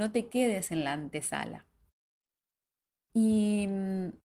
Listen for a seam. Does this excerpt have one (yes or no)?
no